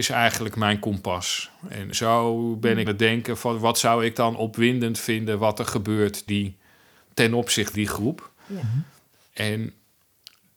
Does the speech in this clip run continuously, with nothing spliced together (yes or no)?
no